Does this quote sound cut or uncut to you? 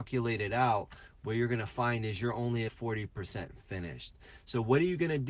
cut